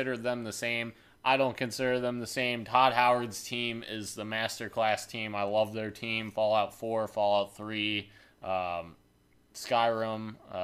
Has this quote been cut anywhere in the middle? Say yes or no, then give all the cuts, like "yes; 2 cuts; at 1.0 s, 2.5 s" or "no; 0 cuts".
no; 0 cuts